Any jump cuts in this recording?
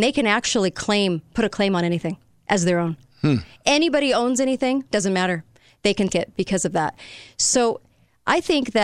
yes; 1 cut; at 6.1 s

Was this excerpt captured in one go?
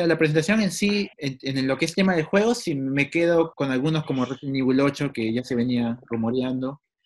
no; 2 cuts; at 1.1 s, 3.5 s

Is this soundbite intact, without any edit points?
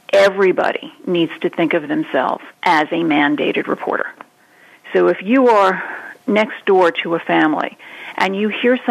no; 1 cut; at 2.5 s

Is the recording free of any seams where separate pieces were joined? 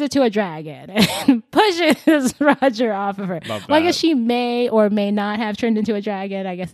yes; 0 cuts

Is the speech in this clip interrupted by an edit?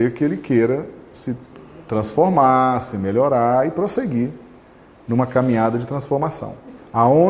no; 0 cuts

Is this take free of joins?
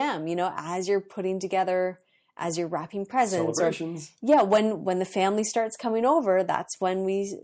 yes; 0 cuts

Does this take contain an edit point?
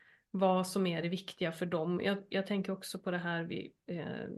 no; 0 cuts

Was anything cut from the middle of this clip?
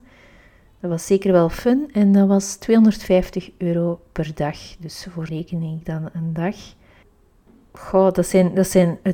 yes; 1 cut; at 5.3 s

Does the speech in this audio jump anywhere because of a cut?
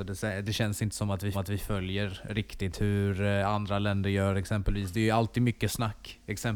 yes; 1 cut; at 1.3 s

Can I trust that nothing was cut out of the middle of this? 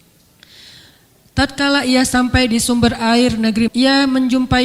no; 1 cut; at 3.7 s

